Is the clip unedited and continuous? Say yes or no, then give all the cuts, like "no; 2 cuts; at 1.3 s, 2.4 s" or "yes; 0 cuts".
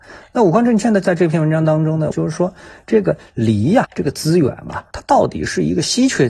no; 1 cut; at 3.8 s